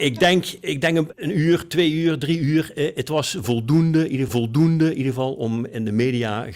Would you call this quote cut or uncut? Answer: cut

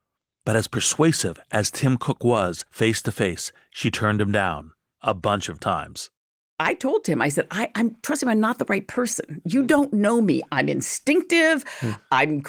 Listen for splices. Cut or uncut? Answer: uncut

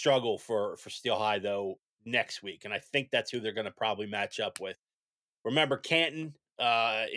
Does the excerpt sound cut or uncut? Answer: uncut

